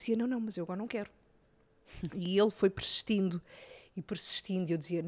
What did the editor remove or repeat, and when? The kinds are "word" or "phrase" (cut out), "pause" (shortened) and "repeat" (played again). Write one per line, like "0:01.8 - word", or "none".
none